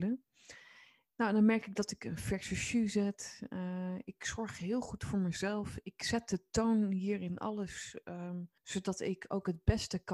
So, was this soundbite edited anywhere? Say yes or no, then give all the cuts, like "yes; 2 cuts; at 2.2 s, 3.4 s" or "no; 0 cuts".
yes; 1 cut; at 8.6 s